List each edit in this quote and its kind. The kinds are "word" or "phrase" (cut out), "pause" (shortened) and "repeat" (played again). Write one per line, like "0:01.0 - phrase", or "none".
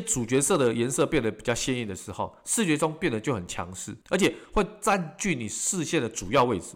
0:04.0 - pause